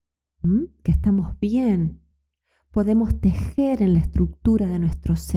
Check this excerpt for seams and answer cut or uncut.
uncut